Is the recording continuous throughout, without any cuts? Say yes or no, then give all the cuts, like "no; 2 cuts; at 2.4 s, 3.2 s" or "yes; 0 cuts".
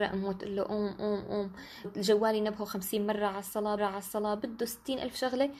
no; 2 cuts; at 1.8 s, 3.8 s